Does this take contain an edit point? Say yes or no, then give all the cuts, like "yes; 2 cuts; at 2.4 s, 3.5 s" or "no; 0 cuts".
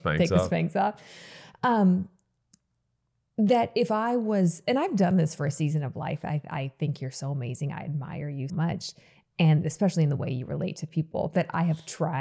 yes; 1 cut; at 8.5 s